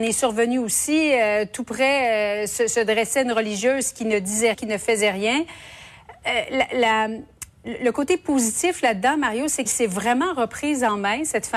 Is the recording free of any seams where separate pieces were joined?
no; 2 cuts; at 4.5 s, 9.7 s

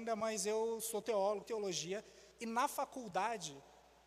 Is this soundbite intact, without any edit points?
no; 2 cuts; at 1.4 s, 2.3 s

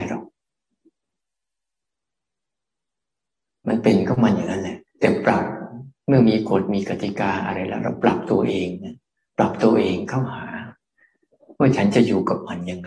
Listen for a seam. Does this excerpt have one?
yes; 1 cut; at 4.9 s

